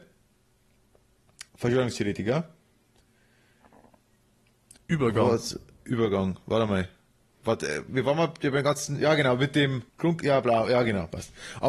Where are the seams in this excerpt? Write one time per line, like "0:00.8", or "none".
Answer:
0:01.5
0:07.9
0:09.9